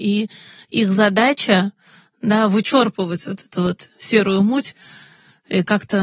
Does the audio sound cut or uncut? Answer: uncut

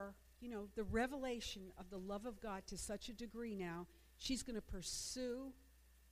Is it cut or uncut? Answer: uncut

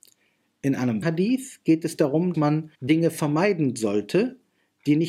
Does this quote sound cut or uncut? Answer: cut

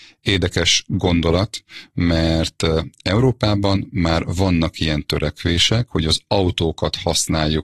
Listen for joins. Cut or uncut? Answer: uncut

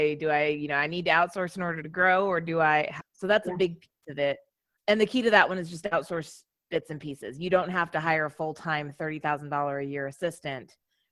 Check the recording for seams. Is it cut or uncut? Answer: cut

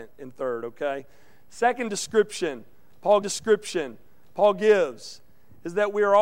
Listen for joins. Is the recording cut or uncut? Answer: cut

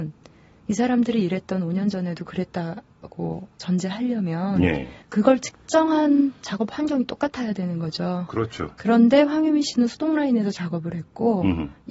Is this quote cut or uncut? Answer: cut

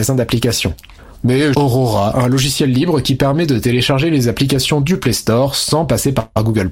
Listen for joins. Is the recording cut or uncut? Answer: cut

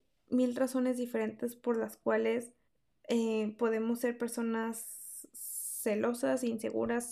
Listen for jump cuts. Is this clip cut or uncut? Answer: cut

